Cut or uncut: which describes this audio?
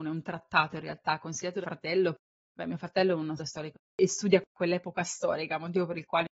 cut